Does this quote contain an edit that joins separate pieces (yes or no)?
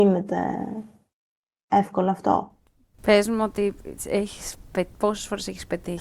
no